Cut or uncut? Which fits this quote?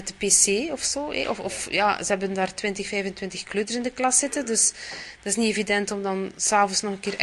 uncut